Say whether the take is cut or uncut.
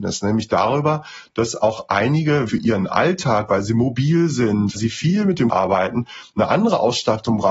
cut